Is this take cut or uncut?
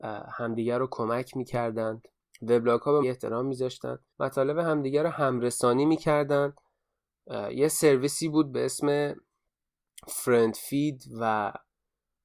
cut